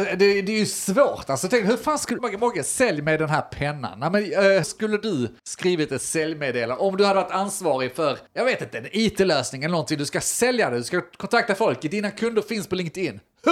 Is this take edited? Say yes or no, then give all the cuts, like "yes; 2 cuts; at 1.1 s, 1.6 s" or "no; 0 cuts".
yes; 4 cuts; at 2.2 s, 4.6 s, 5.4 s, 8.3 s